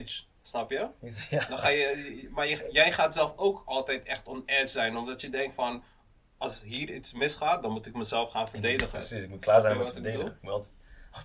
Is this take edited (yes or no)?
no